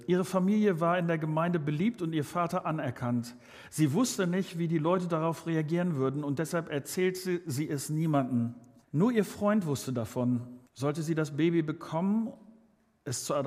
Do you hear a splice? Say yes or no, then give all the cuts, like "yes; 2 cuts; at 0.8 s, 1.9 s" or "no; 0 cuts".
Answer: yes; 2 cuts; at 8.8 s, 10.7 s